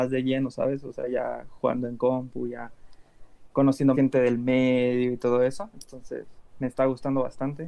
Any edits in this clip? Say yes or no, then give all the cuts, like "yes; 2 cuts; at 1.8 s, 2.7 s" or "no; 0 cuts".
yes; 2 cuts; at 3.9 s, 6.5 s